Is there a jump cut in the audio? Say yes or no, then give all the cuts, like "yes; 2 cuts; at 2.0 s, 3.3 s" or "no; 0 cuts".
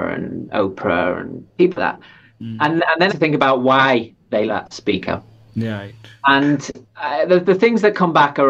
yes; 4 cuts; at 1.8 s, 3.1 s, 4.5 s, 6.9 s